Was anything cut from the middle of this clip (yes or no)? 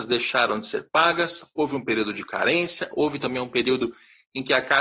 no